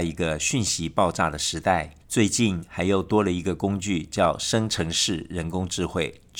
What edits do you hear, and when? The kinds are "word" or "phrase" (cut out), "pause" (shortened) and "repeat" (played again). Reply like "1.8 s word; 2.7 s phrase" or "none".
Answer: 2.0 s pause

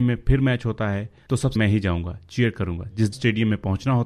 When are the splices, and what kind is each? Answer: 1.6 s word; 3.1 s word

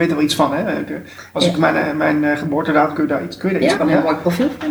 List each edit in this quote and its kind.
1.5 s word; 2.9 s word; 3.7 s word

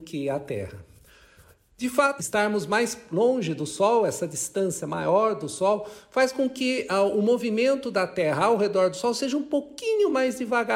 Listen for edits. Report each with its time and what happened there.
2.2 s word

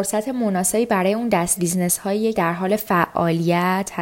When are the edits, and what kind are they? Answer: 1.6 s word; 2.4 s word

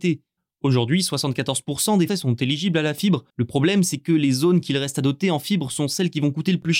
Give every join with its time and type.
2.1 s word; 3.3 s pause

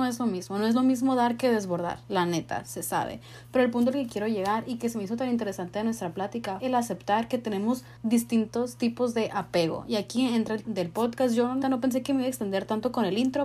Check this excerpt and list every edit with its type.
6.6 s word; 8.0 s pause; 10.6 s word; 11.6 s word

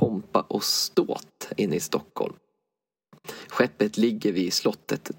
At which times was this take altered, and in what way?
none

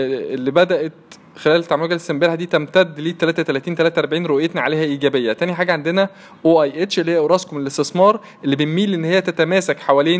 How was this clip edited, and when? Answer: none

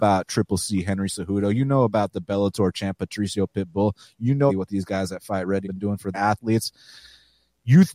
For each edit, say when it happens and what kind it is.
2.7 s word; 4.5 s word; 5.6 s word; 6.1 s word

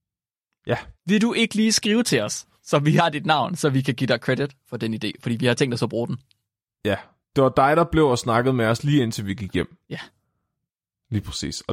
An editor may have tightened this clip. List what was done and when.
1.0 s pause

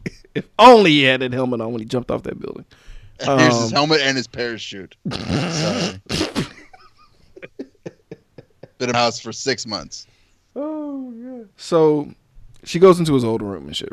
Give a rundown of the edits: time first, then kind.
8.9 s word; 11.5 s pause

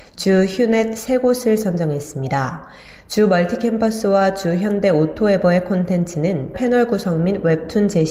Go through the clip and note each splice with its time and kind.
6.5 s word

